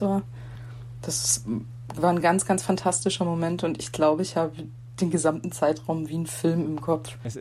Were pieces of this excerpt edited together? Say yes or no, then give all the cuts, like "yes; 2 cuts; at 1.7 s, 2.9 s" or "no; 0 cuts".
no; 0 cuts